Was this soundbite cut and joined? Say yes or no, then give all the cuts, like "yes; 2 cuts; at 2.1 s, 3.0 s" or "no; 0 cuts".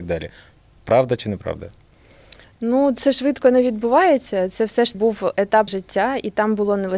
yes; 3 cuts; at 2.4 s, 4.9 s, 5.7 s